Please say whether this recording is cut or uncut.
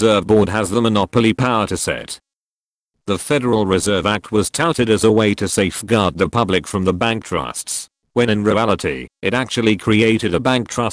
uncut